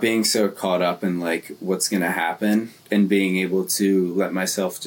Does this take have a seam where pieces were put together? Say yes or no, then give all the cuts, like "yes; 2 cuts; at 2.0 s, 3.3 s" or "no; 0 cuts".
yes; 1 cut; at 2.8 s